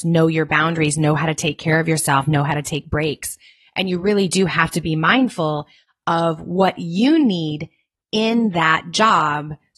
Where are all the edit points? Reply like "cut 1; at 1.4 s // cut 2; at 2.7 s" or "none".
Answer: none